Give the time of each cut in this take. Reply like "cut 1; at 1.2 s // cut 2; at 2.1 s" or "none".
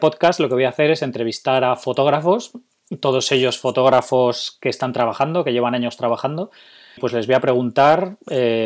cut 1; at 7.0 s